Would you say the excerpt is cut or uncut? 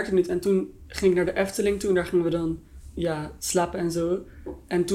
uncut